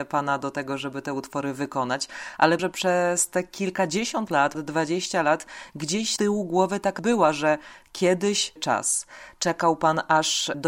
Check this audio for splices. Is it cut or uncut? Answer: cut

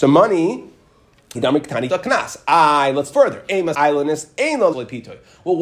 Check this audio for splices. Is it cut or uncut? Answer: cut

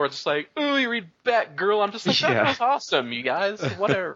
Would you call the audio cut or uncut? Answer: uncut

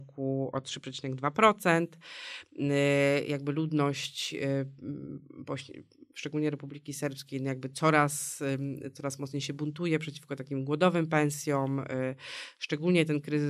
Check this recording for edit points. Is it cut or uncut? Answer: uncut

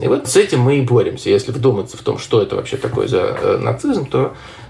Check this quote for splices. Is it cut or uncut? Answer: uncut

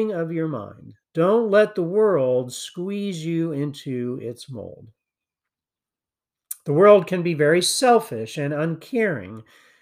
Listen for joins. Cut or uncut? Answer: cut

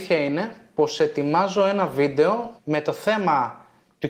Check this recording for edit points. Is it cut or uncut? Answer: cut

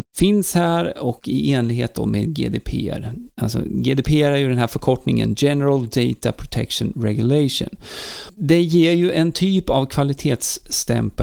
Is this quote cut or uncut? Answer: uncut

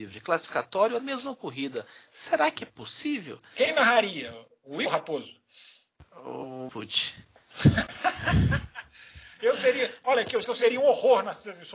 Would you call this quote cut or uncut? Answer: cut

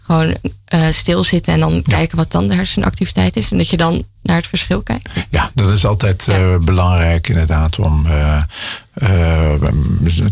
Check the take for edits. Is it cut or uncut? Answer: uncut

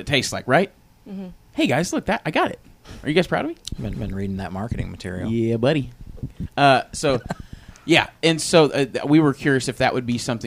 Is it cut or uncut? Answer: cut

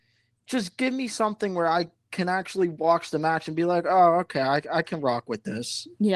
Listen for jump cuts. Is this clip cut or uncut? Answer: uncut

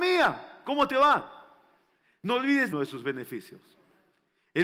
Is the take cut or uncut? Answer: cut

